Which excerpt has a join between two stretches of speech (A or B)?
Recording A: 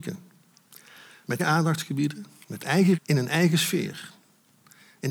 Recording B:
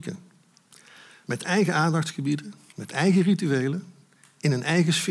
A